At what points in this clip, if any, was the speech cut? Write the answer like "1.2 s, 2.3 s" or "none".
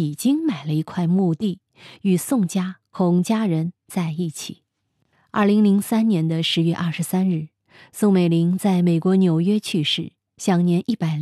none